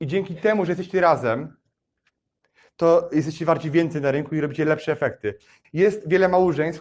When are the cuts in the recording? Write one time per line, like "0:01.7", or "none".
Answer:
0:05.6